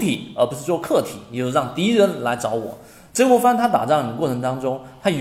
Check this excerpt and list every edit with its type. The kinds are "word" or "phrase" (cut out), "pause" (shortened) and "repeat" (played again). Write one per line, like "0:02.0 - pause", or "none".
none